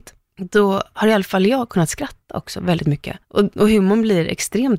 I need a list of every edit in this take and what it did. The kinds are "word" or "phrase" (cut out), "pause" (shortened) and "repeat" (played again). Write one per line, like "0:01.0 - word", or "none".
0:03.2 - pause